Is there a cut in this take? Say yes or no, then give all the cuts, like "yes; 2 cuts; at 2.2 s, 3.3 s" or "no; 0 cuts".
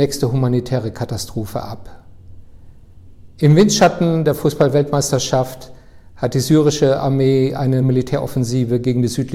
yes; 1 cut; at 7.8 s